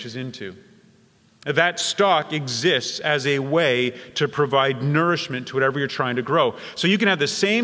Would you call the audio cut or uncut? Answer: uncut